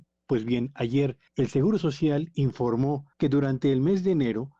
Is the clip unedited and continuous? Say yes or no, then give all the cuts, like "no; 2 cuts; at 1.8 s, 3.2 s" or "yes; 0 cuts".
no; 2 cuts; at 1.3 s, 3.1 s